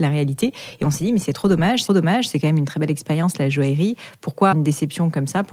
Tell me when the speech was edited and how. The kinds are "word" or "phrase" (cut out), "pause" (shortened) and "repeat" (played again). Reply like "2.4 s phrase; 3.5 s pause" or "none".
1.9 s repeat; 4.5 s word

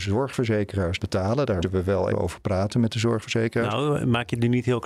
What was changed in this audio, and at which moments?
1.0 s word; 1.6 s word; 2.1 s word

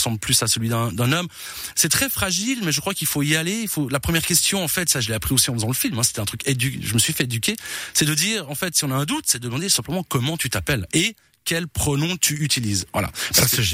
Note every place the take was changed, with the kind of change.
none

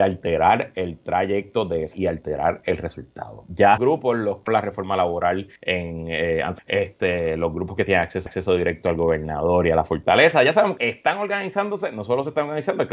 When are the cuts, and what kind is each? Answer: 1.9 s word; 3.8 s phrase; 4.5 s word; 5.6 s pause; 6.6 s phrase; 8.3 s repeat; 10.8 s phrase

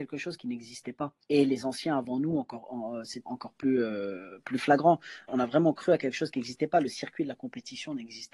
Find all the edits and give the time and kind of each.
1.2 s pause; 3.3 s word; 5.3 s word

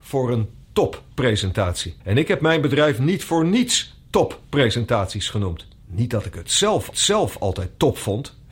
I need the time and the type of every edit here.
2.0 s pause; 5.8 s pause; 6.9 s repeat

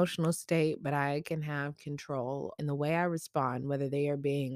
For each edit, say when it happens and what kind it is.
2.6 s phrase

